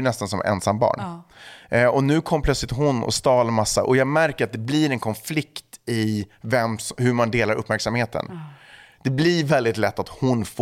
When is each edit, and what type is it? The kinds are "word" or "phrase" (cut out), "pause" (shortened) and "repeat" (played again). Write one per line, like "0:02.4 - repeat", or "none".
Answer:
none